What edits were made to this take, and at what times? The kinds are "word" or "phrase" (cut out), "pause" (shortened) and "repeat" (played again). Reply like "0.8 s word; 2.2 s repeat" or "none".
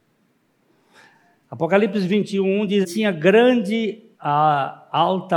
2.8 s word; 4.1 s pause